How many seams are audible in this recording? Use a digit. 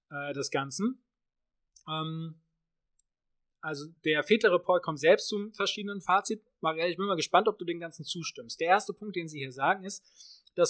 1